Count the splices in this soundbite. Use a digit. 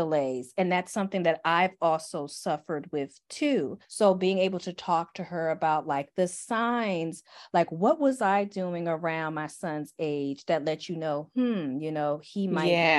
1